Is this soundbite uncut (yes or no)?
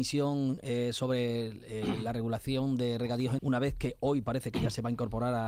no